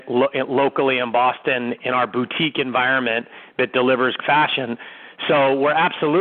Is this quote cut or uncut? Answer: cut